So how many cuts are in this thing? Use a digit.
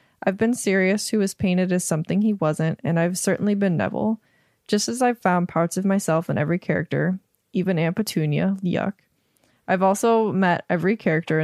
0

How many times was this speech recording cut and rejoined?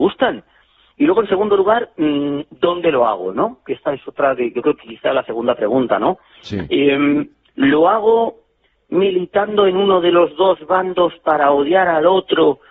0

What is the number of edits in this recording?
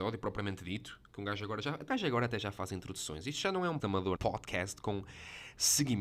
3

